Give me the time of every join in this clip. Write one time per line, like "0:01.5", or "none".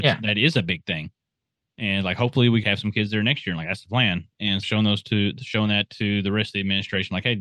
0:02.6
0:04.6